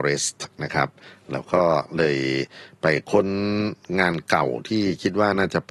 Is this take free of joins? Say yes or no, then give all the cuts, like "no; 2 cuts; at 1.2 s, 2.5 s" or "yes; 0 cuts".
yes; 0 cuts